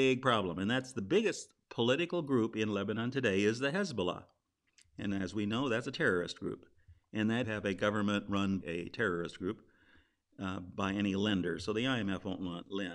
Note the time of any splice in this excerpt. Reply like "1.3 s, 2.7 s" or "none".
7.4 s, 8.6 s